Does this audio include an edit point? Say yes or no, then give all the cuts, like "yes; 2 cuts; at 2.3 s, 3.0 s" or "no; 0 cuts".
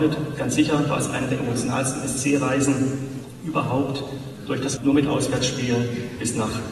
yes; 1 cut; at 4.8 s